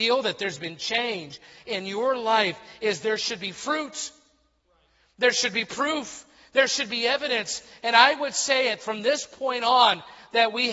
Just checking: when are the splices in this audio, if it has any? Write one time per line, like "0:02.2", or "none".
none